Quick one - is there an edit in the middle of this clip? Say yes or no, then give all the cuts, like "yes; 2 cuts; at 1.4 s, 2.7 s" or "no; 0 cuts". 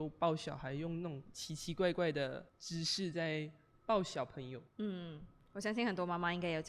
yes; 2 cuts; at 2.5 s, 4.7 s